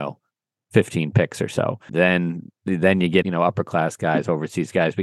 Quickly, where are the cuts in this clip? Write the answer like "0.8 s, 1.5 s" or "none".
1.9 s, 3.2 s